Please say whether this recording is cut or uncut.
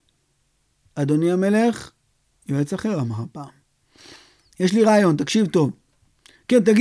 uncut